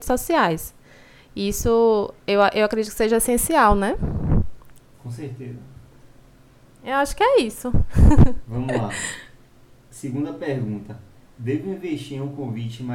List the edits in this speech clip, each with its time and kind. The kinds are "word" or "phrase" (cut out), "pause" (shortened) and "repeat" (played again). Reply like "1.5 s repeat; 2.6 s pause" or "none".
none